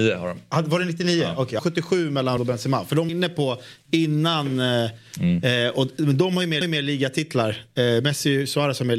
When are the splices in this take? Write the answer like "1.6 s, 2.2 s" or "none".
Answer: 1.6 s, 2.4 s, 3.1 s, 6.6 s